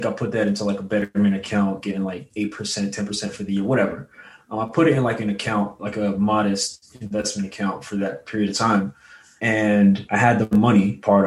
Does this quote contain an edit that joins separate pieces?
no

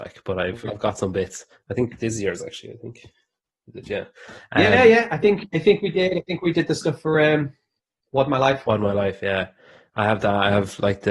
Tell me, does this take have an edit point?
no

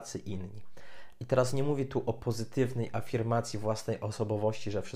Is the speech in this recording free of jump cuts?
yes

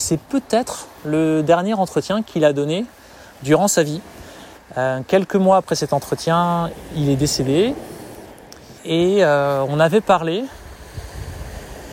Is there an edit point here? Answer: yes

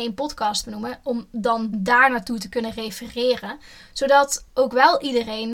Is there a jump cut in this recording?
no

